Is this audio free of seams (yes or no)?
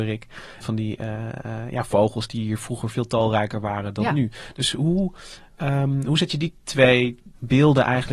yes